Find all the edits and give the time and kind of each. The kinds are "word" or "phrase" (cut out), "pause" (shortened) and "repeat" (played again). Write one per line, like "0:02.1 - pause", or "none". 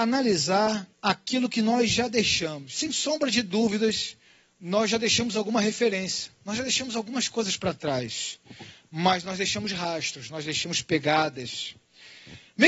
0:00.9 - pause
0:04.3 - pause